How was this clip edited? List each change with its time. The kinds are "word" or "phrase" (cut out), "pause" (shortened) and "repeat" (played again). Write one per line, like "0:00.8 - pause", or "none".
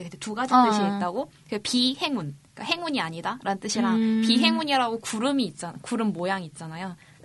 none